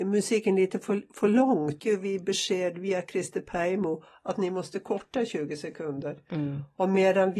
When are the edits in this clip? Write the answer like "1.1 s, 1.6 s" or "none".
1.8 s